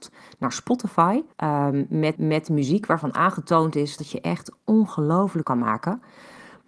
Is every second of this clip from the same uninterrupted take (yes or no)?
no